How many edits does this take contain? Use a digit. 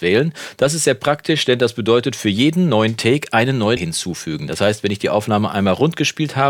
1